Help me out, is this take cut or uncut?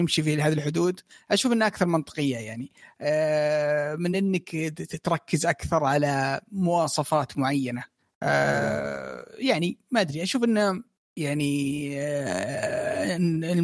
uncut